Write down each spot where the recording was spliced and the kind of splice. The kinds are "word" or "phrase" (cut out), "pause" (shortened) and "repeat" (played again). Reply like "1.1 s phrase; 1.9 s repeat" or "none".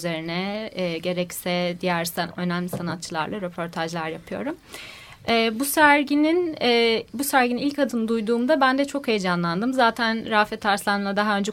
none